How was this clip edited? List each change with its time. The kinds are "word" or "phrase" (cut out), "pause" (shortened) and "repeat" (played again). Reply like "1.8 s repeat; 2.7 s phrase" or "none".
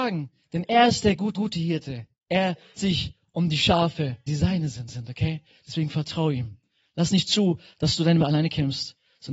1.3 s repeat; 2.8 s word; 4.3 s word; 4.9 s repeat; 8.2 s phrase